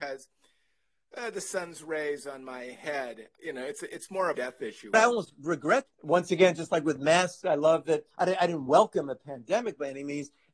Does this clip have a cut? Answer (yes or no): yes